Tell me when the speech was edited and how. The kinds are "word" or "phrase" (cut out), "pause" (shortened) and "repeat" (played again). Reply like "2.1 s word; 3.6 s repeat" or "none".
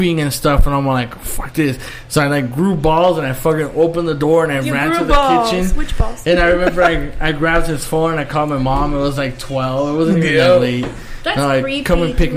none